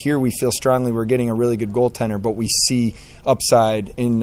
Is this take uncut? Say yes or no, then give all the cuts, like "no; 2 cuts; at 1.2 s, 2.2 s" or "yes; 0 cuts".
yes; 0 cuts